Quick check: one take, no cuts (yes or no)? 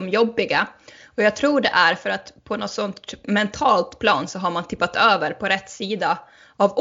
yes